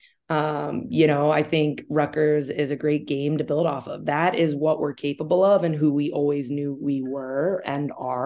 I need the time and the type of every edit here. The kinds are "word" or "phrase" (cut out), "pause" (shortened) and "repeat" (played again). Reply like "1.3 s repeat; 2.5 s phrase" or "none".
none